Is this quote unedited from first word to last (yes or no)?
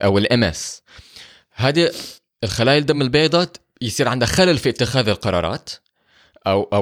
yes